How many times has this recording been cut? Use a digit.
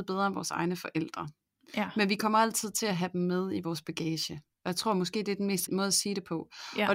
1